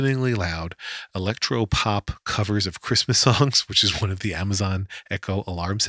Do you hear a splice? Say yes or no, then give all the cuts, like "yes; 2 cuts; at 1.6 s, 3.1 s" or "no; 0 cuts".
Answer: no; 0 cuts